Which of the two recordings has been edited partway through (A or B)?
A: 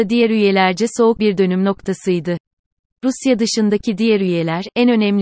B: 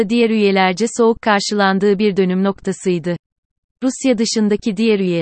A